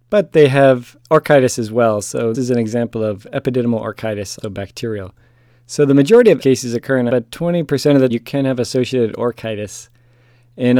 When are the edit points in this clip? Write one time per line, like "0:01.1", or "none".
0:02.3
0:04.4
0:06.4
0:07.1
0:08.1